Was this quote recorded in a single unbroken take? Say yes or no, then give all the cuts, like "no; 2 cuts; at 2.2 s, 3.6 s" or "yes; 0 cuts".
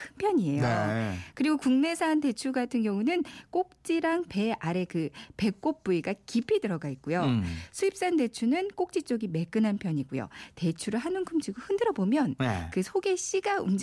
yes; 0 cuts